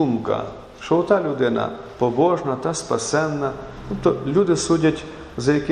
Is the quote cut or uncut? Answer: uncut